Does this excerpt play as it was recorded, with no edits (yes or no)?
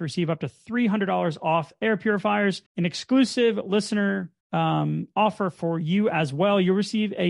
no